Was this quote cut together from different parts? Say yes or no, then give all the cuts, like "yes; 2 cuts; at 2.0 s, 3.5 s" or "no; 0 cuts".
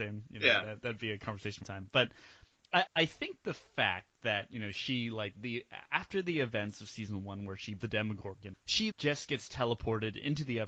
yes; 6 cuts; at 1.6 s, 2.9 s, 5.4 s, 7.8 s, 8.5 s, 8.9 s